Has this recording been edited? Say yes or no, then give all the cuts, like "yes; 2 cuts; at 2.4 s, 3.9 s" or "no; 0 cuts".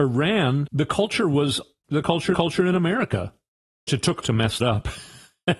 yes; 5 cuts; at 1.8 s, 2.3 s, 3.9 s, 4.2 s, 4.6 s